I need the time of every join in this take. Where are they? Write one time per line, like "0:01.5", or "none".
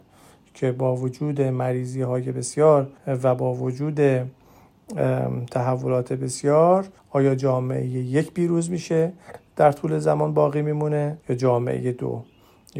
0:03.0
0:07.0
0:11.2